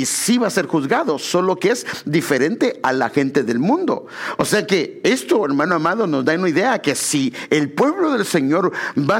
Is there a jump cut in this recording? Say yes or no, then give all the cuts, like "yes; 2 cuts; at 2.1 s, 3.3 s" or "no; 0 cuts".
no; 0 cuts